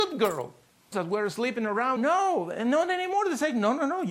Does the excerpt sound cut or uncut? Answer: cut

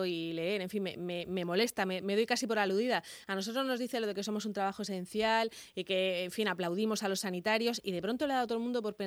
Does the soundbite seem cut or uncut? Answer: uncut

